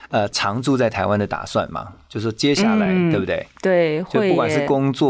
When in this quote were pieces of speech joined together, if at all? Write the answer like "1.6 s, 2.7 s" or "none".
none